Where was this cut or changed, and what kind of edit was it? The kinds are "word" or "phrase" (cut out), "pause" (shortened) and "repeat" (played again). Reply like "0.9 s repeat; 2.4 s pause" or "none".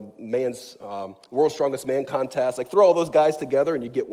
none